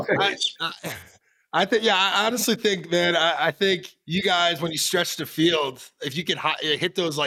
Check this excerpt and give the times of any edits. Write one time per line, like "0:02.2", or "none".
0:04.0